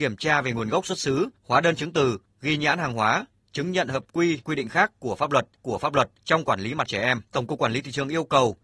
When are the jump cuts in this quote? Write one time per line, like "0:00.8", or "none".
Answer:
0:04.4
0:05.6
0:06.9
0:07.3